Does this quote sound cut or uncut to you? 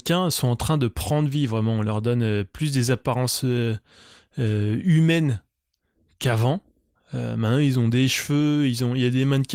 uncut